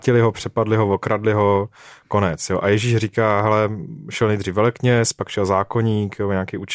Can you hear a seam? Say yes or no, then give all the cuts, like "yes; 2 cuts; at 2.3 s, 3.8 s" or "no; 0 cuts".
no; 0 cuts